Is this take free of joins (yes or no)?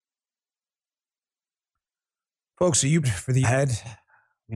no